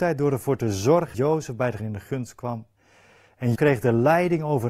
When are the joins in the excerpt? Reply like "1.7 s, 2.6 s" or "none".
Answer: 1.1 s, 1.8 s, 3.5 s